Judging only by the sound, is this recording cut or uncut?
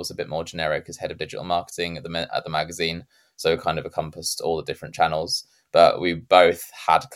uncut